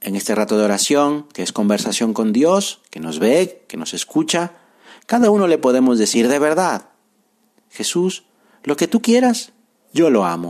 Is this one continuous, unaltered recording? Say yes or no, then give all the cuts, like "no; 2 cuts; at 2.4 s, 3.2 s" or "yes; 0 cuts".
yes; 0 cuts